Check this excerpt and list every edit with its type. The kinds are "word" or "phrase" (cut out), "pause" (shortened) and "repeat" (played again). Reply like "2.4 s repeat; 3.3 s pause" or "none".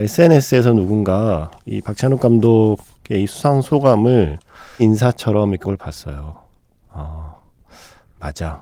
4.8 s word; 5.6 s word